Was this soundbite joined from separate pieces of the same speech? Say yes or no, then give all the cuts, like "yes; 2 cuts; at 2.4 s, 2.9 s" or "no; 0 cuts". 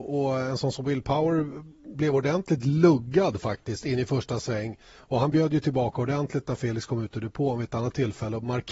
no; 0 cuts